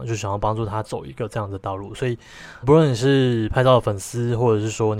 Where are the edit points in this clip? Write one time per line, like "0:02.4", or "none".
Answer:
0:02.6